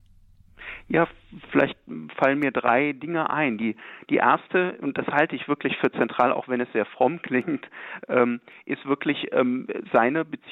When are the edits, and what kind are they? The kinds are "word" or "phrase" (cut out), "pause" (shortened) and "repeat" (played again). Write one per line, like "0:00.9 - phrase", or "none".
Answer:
none